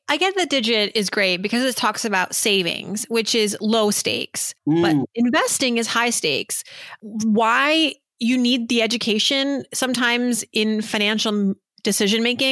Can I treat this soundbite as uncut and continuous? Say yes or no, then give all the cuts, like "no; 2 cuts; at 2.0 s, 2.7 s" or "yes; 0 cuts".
no; 1 cut; at 4.6 s